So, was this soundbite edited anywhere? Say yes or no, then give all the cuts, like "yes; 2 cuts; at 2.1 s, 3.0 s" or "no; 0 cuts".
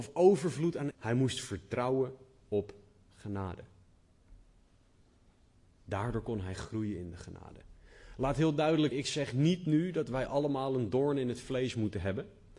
yes; 2 cuts; at 0.9 s, 8.9 s